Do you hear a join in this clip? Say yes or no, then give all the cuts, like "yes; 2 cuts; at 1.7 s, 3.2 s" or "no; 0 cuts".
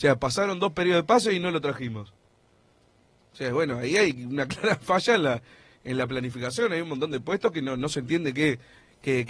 no; 0 cuts